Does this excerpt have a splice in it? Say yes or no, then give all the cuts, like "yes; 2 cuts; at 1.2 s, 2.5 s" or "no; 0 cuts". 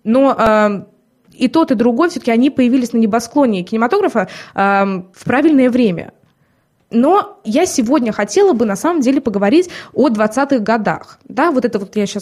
no; 0 cuts